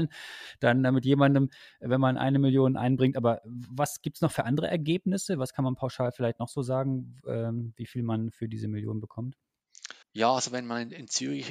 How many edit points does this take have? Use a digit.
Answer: 1